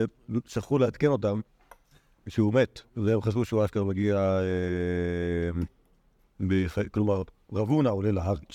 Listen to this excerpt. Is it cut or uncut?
cut